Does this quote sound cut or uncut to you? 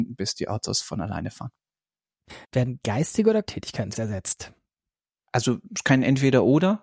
cut